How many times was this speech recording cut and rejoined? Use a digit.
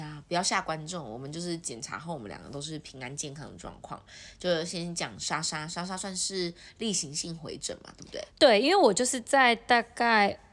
1